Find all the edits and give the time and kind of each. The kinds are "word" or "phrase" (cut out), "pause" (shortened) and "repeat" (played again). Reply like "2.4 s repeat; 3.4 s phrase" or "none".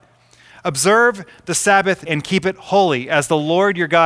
2.1 s word